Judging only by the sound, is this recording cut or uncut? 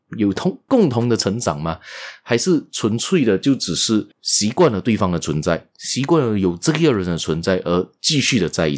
cut